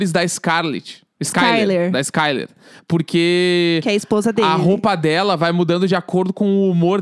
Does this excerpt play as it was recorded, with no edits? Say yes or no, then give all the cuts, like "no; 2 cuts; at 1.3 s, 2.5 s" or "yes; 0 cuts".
yes; 0 cuts